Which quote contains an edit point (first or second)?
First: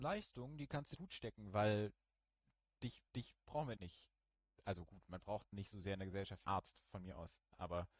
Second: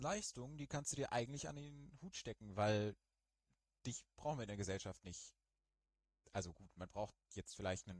first